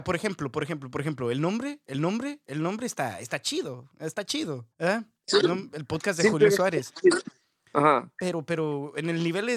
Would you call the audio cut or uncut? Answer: cut